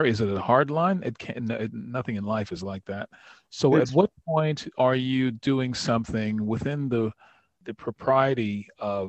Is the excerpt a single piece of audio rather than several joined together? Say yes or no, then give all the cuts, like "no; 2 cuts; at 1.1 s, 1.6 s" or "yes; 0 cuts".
yes; 0 cuts